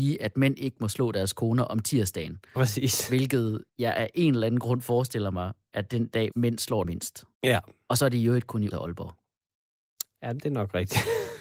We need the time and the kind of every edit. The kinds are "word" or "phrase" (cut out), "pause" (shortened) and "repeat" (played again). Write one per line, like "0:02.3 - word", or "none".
0:03.7 - pause
0:06.3 - word
0:06.8 - phrase
0:07.3 - pause
0:08.7 - word